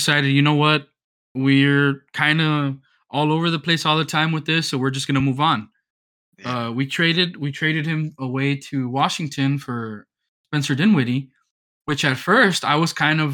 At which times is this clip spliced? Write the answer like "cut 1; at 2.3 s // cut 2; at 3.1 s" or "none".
none